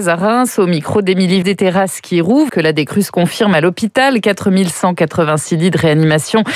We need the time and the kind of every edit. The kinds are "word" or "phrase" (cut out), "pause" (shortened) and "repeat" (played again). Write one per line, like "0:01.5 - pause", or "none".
0:01.4 - word
0:02.5 - word